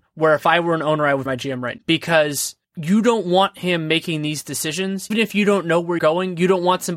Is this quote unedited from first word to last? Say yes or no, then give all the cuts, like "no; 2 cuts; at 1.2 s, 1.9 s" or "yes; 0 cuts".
no; 4 cuts; at 1.3 s, 1.8 s, 5.1 s, 6.0 s